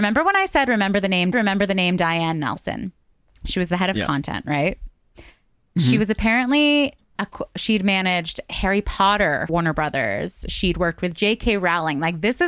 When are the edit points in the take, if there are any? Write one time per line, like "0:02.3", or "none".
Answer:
0:01.3
0:09.5